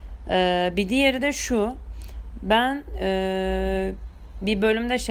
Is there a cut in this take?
no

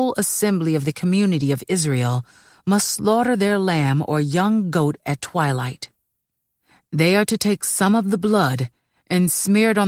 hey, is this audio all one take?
yes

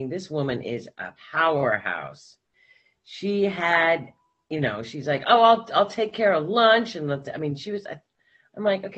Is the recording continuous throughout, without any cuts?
no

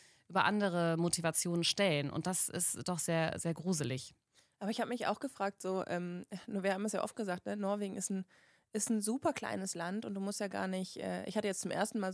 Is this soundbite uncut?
yes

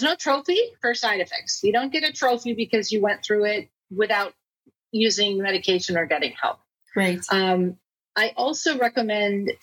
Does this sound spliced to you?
no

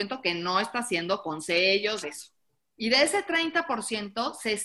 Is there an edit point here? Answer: yes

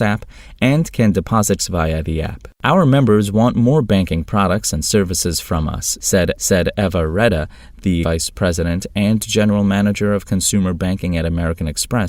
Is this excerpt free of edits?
no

